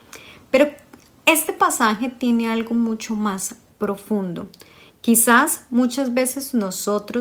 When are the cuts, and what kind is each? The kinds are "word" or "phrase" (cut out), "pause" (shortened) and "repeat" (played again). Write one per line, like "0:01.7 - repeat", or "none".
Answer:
none

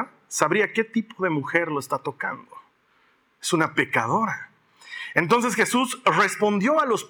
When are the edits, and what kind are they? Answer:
none

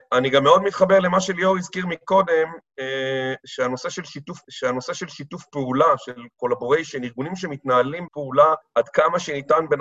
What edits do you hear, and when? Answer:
0:04.4 - repeat
0:08.1 - word
0:08.6 - pause

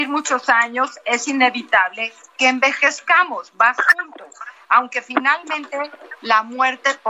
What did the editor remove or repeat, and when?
none

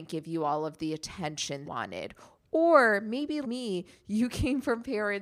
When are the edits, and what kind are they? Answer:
0:01.6 - phrase
0:03.4 - word

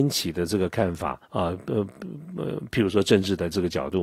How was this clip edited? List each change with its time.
0:01.2 - pause

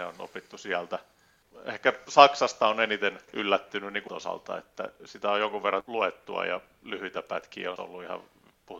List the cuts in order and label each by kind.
0:03.3 - pause
0:04.1 - word
0:05.8 - word
0:07.8 - word

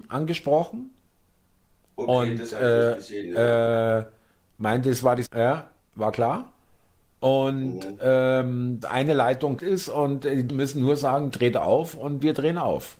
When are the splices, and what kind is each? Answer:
0:05.2 - word
0:08.8 - word
0:09.6 - word
0:10.5 - word
0:11.3 - word

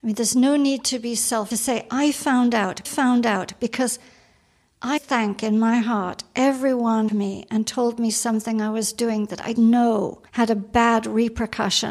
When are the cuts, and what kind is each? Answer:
0:01.5 - phrase
0:02.8 - repeat
0:05.0 - word
0:07.1 - phrase
0:09.5 - word
0:10.3 - pause

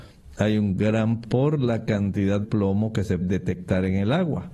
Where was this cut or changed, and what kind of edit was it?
0:01.2 - word
0:02.4 - word
0:03.2 - word

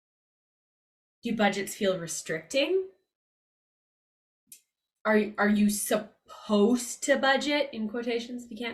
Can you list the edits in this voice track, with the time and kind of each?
none

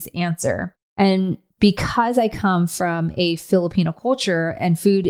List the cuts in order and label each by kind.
0:01.5 - pause

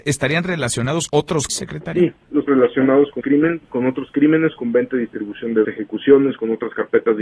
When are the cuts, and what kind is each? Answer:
0:01.1 - word
0:01.5 - word
0:02.5 - word
0:03.2 - word
0:03.6 - pause
0:05.6 - phrase

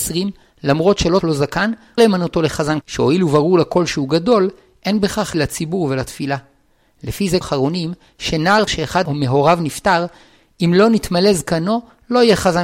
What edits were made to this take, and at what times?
0:01.2 - word
0:02.0 - word
0:02.8 - word
0:05.3 - word
0:07.4 - word
0:08.7 - word

